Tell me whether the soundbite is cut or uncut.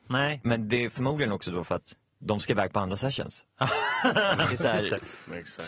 cut